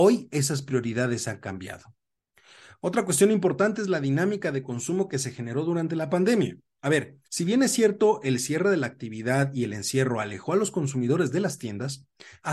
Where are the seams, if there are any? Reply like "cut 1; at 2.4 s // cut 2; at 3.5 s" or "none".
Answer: cut 1; at 7.2 s